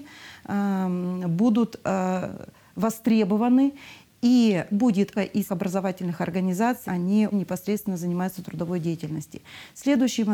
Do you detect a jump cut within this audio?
yes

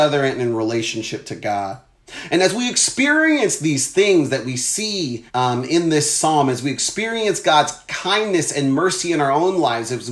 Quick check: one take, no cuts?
no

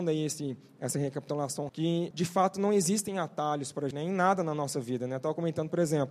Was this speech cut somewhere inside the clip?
yes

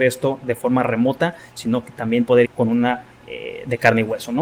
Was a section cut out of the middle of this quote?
yes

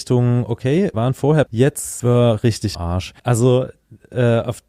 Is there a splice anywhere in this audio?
yes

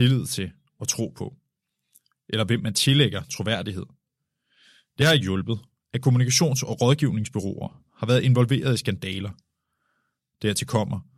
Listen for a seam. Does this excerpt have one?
no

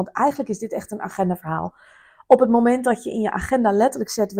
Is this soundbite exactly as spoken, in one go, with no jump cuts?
yes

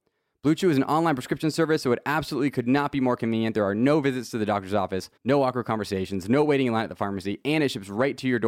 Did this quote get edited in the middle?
yes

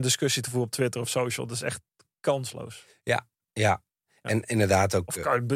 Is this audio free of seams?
yes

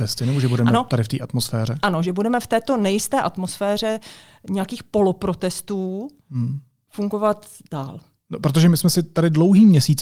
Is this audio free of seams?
yes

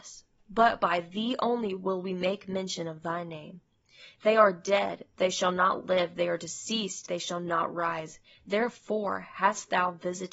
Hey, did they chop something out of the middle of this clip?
no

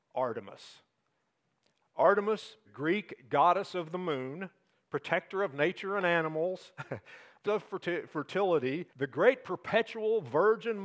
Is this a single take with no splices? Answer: no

